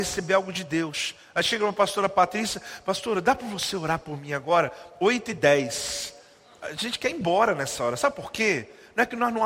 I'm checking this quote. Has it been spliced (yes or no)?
no